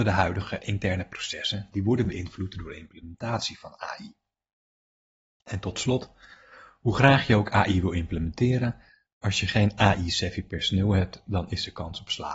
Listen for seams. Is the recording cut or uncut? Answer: uncut